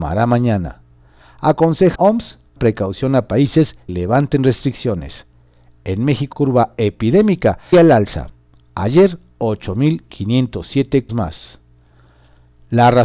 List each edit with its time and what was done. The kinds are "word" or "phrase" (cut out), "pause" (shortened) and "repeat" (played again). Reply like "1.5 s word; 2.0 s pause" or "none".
1.9 s word; 2.6 s word; 3.9 s word; 6.3 s word; 7.7 s word; 11.1 s word

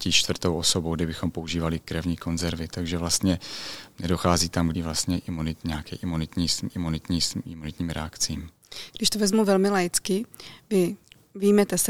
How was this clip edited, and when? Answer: 1.8 s word; 4.7 s phrase; 6.7 s repeat

